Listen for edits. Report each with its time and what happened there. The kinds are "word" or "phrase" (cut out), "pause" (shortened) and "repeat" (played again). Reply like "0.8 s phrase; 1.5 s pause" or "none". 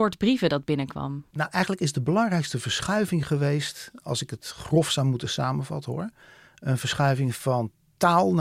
1.3 s pause